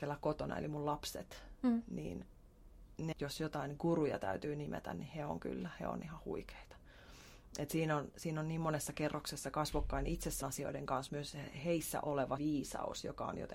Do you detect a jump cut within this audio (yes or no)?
yes